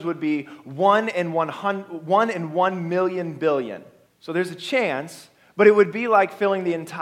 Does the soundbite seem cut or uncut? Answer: cut